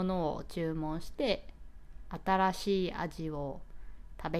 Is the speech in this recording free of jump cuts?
yes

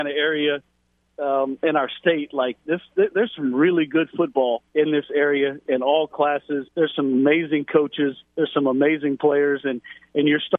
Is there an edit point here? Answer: yes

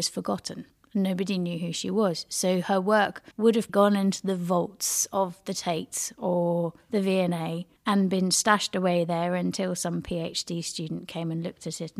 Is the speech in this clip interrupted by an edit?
yes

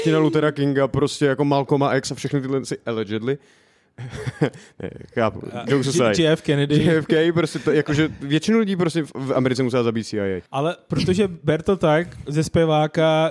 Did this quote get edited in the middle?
yes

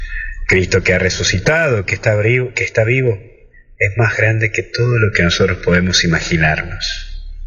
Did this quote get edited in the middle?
no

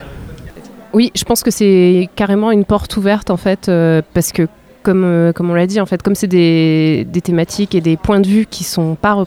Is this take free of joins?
yes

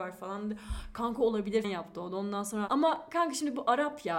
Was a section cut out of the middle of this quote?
yes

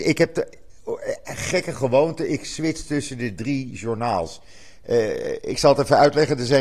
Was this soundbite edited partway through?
no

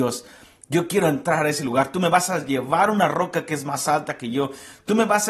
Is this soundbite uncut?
yes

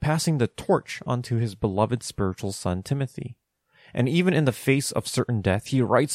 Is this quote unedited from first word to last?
yes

